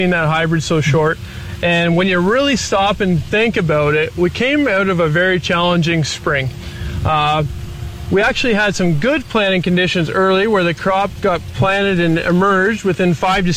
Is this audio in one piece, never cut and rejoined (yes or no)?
yes